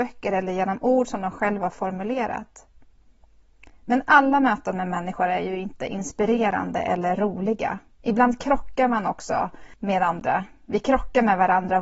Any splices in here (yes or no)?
no